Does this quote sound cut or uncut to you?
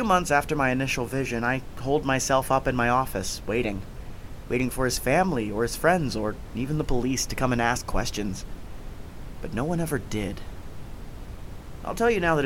uncut